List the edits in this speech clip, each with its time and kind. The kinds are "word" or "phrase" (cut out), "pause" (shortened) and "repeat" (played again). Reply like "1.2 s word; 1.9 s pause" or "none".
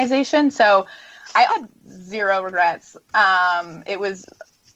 1.5 s word